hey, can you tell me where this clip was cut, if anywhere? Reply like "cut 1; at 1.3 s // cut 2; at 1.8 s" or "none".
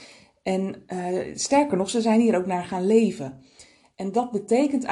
none